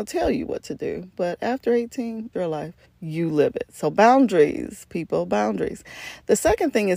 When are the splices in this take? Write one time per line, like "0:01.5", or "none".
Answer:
0:02.3
0:02.8